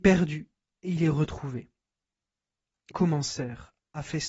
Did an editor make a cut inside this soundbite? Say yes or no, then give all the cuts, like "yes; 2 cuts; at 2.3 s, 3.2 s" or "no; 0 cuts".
yes; 1 cut; at 2.9 s